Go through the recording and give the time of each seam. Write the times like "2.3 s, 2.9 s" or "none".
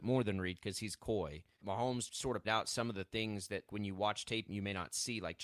1.6 s, 2.1 s, 2.4 s, 3.7 s, 4.5 s